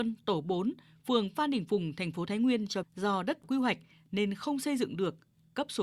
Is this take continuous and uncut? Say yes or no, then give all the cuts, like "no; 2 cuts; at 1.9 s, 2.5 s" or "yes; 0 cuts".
no; 2 cuts; at 2.8 s, 3.4 s